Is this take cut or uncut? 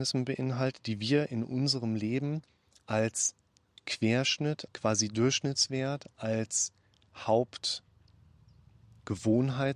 cut